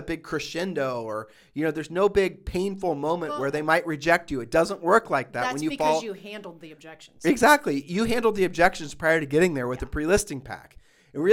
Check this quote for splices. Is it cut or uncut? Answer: uncut